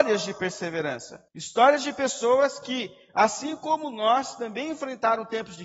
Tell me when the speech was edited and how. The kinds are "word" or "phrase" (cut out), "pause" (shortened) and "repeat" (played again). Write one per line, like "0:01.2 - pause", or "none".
0:01.3 - pause